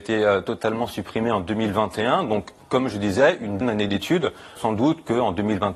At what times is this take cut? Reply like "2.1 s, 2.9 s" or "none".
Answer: 3.6 s, 4.6 s